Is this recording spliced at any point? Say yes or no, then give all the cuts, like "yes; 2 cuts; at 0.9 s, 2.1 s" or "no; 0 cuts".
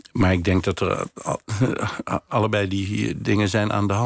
yes; 1 cut; at 2.3 s